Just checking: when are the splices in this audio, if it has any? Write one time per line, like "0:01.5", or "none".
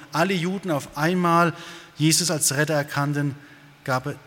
none